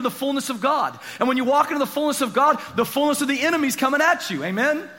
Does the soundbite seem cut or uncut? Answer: uncut